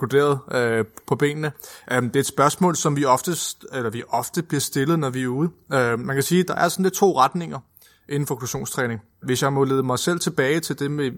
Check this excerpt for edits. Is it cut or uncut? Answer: uncut